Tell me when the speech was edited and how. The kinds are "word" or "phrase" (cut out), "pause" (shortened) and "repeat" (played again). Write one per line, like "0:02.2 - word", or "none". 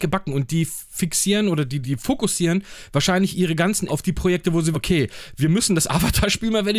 0:01.8 - word
0:03.9 - word
0:04.7 - word